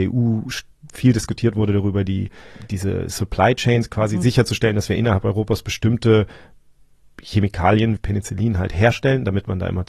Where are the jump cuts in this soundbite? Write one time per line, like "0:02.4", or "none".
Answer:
0:08.0

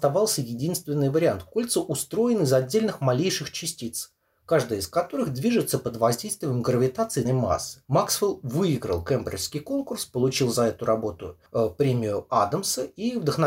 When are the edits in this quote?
0:07.2
0:07.8
0:11.5

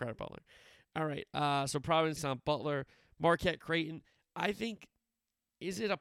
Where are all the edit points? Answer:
0:02.2

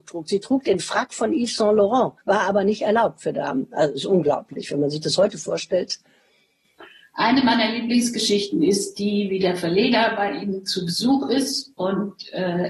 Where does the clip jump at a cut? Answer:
0:02.2

